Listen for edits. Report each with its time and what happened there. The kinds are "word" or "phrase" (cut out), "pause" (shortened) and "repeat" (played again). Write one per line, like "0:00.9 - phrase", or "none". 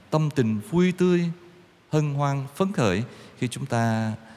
none